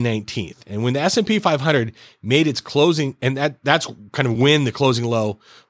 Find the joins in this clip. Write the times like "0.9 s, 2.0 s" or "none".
none